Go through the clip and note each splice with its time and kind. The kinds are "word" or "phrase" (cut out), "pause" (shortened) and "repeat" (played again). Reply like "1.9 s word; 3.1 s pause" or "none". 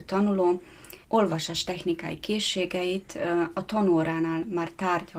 1.0 s pause